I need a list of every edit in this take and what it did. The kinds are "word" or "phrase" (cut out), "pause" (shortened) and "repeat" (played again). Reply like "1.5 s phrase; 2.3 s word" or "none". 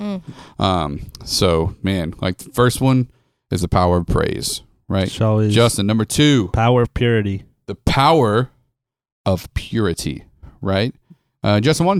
none